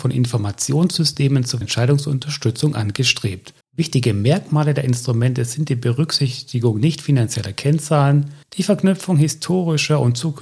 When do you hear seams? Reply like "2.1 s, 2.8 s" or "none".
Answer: 1.6 s, 3.6 s, 8.4 s